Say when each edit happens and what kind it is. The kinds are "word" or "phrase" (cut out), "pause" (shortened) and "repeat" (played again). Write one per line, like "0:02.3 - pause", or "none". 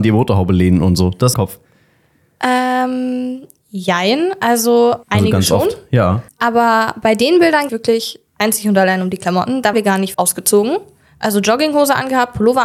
0:01.3 - phrase
0:05.0 - pause
0:06.3 - pause
0:07.7 - phrase
0:08.3 - pause
0:09.7 - word
0:10.1 - word